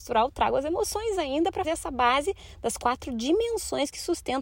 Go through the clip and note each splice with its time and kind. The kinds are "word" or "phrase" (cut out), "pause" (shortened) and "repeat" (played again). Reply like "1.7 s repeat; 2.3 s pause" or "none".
1.6 s word